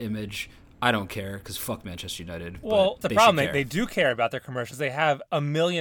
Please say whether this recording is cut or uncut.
cut